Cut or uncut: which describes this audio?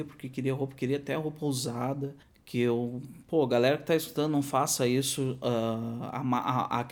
cut